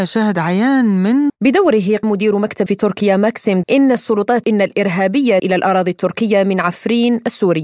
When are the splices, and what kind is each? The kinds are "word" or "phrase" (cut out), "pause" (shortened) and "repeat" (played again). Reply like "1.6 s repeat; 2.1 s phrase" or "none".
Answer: 1.3 s word; 2.0 s word; 2.7 s word; 3.6 s word; 4.4 s word; 5.4 s word

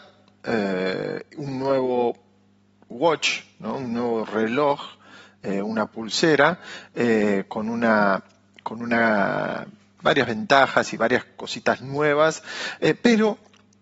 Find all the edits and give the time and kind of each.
none

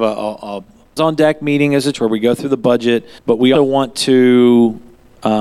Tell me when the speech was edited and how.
1.0 s phrase; 1.9 s word; 3.2 s pause; 3.5 s word

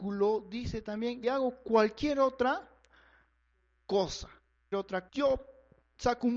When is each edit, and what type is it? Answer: 1.2 s word; 4.7 s word; 5.1 s word

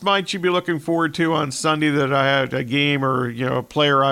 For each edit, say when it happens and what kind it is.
none

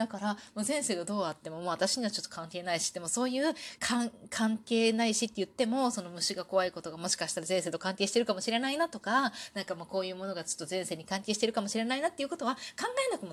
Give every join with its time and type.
3.8 s phrase

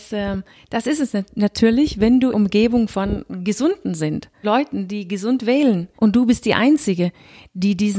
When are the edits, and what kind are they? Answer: 2.3 s phrase; 4.4 s word; 6.0 s pause

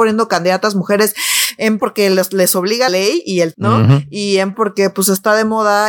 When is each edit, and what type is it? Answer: 1.8 s word; 2.9 s word; 3.5 s word; 4.5 s word

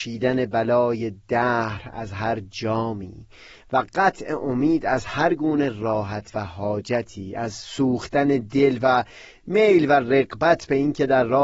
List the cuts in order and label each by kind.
none

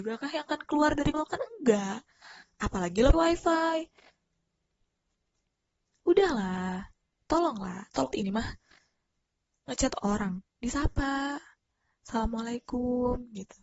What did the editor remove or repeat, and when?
1.1 s word; 3.1 s word; 8.1 s word; 10.4 s word

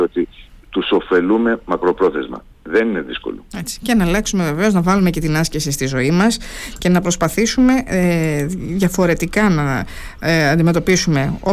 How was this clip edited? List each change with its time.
3.5 s pause

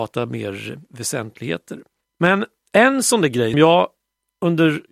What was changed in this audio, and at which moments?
2.0 s pause; 3.5 s word

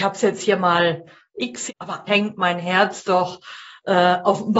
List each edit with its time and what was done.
1.3 s word; 1.7 s word; 2.1 s word

